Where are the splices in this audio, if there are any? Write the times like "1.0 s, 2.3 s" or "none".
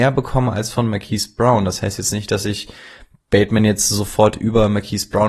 none